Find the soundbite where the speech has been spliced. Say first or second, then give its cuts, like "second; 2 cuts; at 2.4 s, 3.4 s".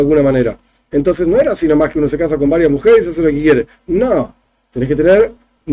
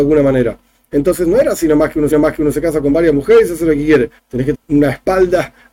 second; 3 cuts; at 2.1 s, 4.2 s, 4.5 s